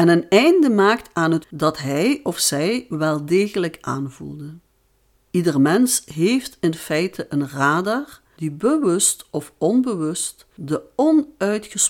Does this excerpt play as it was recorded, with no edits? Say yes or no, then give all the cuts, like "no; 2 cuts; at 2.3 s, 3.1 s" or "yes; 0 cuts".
no; 2 cuts; at 1.4 s, 5.1 s